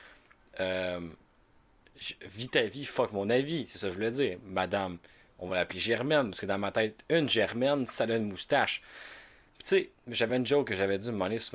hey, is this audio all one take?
yes; 0 cuts

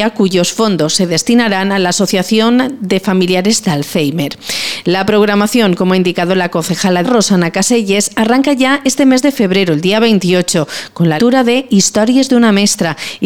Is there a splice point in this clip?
yes; 2 cuts; at 7.0 s, 11.2 s

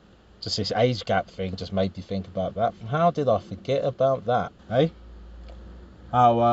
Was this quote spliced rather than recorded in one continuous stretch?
yes; 1 cut; at 4.6 s

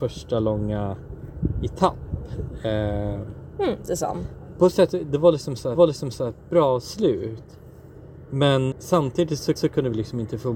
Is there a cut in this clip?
yes; 4 cuts; at 3.9 s, 5.7 s, 8.7 s, 9.6 s

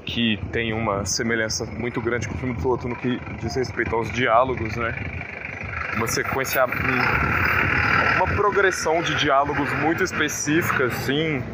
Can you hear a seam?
no; 0 cuts

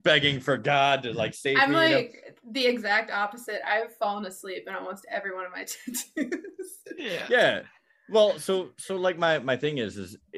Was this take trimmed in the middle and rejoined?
no; 0 cuts

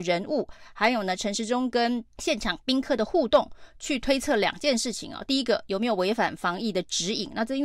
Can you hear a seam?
yes; 1 cut; at 2.1 s

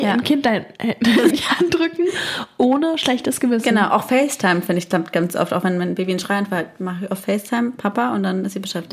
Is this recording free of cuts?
no; 1 cut; at 1.3 s

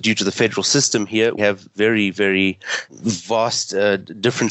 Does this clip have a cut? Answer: yes; 2 cuts; at 1.4 s, 2.9 s

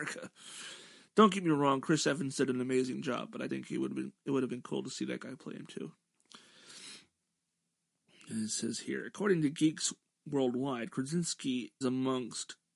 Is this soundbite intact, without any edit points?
no; 2 cuts; at 3.5 s, 11.8 s

